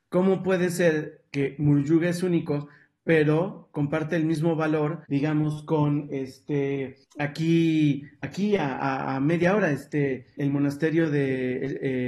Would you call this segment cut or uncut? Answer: cut